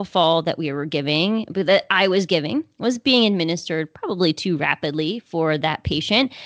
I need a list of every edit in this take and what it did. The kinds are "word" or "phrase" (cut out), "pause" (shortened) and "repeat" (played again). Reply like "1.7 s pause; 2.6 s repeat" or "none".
none